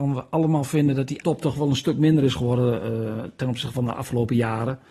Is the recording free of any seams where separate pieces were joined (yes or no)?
no